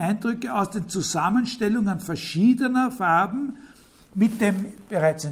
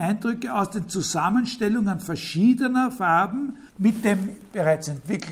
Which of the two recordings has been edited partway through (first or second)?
second